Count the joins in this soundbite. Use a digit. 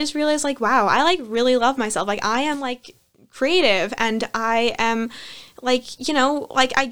0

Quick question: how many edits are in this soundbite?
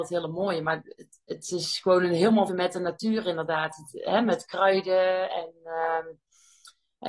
1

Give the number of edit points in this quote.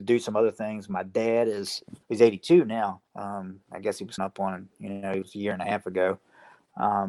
4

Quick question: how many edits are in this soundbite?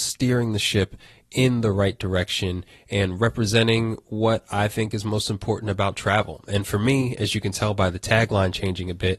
0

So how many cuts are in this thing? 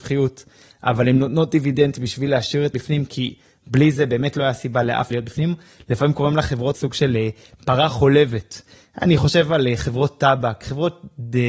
3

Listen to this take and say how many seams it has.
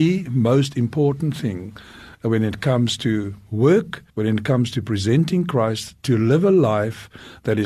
1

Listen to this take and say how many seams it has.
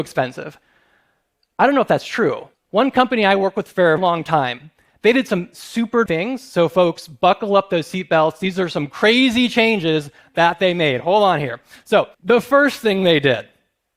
4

